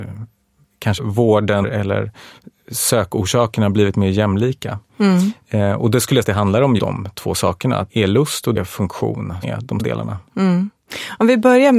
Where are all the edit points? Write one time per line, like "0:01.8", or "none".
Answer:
0:01.0
0:01.6
0:06.2
0:06.8
0:07.9
0:08.6
0:09.4
0:09.8